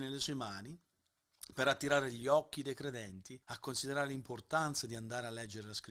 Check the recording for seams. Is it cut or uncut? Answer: cut